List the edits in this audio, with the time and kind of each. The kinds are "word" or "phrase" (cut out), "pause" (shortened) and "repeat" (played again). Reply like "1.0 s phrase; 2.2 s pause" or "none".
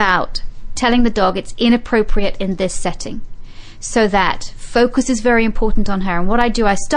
none